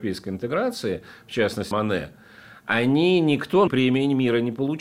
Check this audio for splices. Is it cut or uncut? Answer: cut